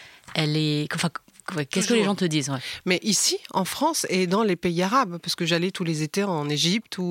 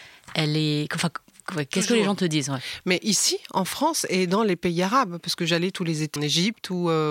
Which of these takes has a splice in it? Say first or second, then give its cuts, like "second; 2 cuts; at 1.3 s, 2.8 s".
second; 1 cut; at 6.2 s